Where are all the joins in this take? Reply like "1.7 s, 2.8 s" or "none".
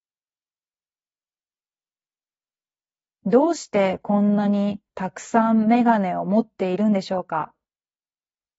4.9 s

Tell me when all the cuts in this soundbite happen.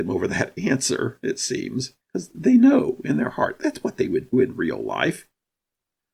2.0 s, 4.3 s

